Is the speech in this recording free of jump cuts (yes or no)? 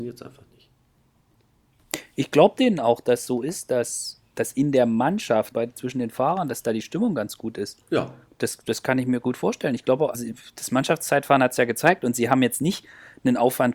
no